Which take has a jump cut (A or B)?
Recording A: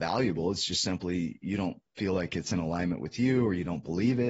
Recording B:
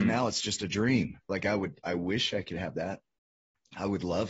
A